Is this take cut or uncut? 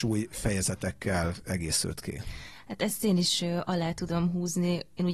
uncut